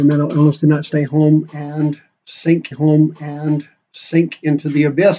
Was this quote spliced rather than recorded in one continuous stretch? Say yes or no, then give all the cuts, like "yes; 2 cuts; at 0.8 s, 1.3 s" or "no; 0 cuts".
yes; 1 cut; at 2.7 s